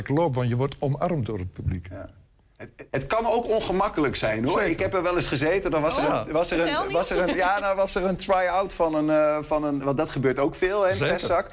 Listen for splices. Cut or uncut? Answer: cut